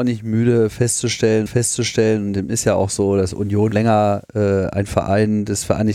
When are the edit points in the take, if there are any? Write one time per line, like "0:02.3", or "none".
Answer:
0:01.5
0:03.7